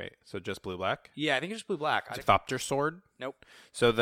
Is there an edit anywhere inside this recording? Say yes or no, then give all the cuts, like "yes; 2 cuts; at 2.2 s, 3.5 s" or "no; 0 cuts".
yes; 1 cut; at 2.2 s